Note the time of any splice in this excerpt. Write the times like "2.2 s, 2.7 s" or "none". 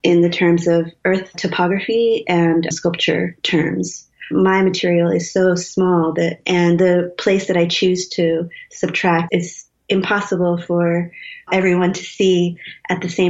2.7 s, 6.4 s, 9.3 s